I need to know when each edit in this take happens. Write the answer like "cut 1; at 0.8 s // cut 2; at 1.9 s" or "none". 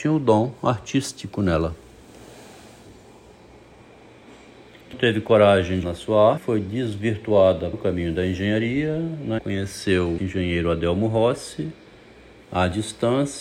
cut 1; at 4.9 s // cut 2; at 5.8 s // cut 3; at 6.4 s // cut 4; at 7.7 s // cut 5; at 9.4 s // cut 6; at 10.2 s